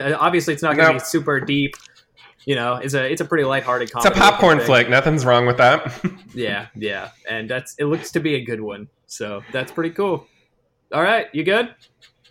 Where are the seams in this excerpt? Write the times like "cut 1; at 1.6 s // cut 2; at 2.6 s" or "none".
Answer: none